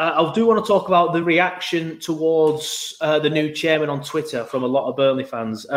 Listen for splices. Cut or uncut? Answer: uncut